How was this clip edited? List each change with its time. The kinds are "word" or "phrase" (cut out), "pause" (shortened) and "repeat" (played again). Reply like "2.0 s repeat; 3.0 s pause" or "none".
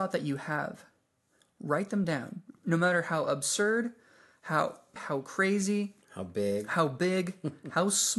5.0 s word; 6.0 s pause